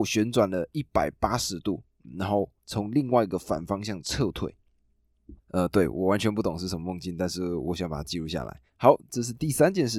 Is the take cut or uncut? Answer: cut